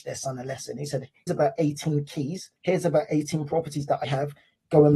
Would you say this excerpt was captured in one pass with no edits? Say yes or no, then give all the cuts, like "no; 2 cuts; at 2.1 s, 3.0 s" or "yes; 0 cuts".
no; 3 cuts; at 1.3 s, 2.6 s, 4.0 s